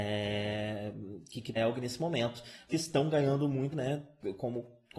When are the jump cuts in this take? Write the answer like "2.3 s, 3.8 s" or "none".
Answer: 1.6 s, 2.7 s, 3.7 s